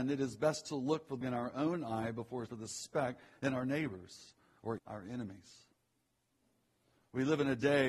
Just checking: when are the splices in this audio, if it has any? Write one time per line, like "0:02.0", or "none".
0:01.2
0:02.5
0:04.8

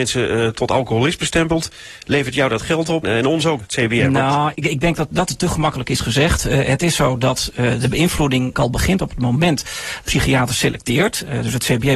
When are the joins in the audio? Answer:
0:03.0
0:03.6
0:04.5
0:05.1
0:08.5
0:10.0

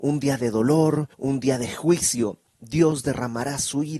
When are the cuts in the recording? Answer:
0:01.1

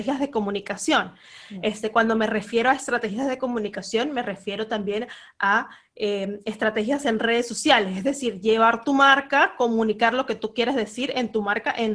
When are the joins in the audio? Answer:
none

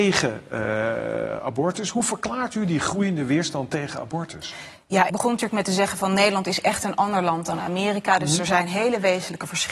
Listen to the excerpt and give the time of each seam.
0:05.1

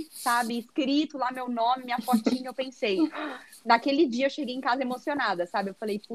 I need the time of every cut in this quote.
none

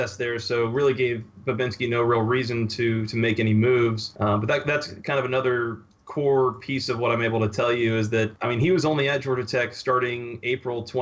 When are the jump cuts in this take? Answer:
none

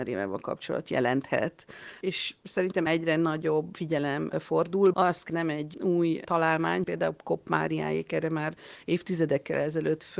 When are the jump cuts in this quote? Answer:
0:02.9
0:04.9
0:05.3
0:05.7
0:06.8

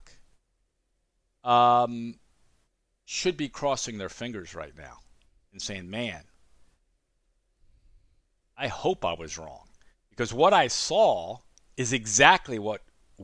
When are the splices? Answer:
none

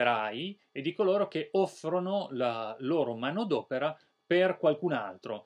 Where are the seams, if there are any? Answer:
none

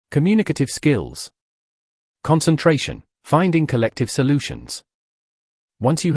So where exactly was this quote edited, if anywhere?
0:03.1

